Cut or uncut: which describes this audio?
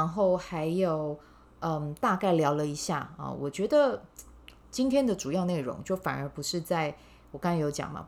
uncut